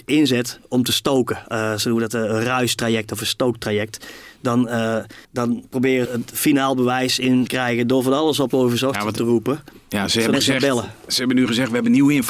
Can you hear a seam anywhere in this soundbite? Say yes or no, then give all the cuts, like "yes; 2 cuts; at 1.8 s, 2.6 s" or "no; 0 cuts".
yes; 5 cuts; at 5.2 s, 6.1 s, 7.5 s, 8.5 s, 10.3 s